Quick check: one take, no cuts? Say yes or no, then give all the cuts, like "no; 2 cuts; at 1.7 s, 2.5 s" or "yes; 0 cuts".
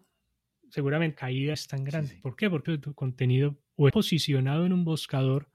no; 4 cuts; at 1.2 s, 1.5 s, 2.7 s, 3.9 s